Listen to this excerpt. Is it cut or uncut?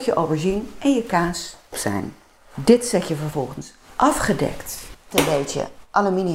cut